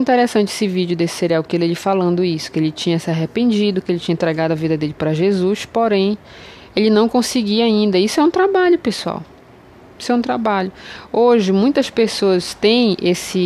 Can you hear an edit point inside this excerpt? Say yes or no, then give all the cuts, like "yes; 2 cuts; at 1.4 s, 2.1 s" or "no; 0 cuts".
no; 0 cuts